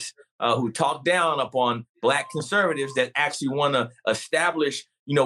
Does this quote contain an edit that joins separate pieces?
no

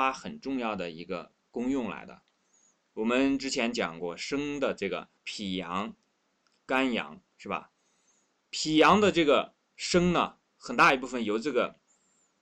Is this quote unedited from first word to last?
no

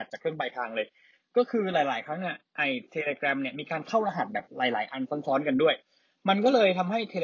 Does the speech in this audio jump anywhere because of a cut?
no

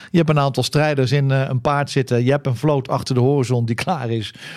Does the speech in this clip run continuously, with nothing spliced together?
yes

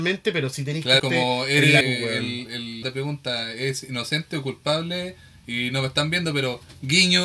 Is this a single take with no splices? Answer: no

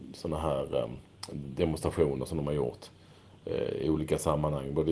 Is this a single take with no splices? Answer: yes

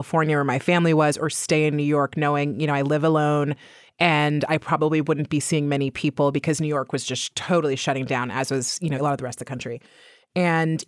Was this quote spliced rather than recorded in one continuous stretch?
no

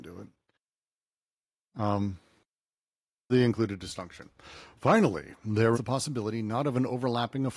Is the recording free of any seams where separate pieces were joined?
no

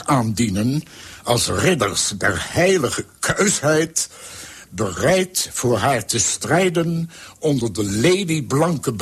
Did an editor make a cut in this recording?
no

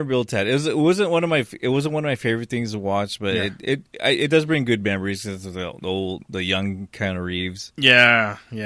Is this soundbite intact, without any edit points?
yes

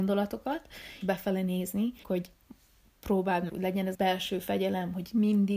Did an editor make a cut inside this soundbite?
yes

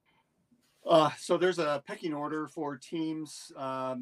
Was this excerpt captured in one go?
yes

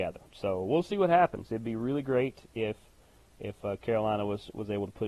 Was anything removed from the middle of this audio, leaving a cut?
no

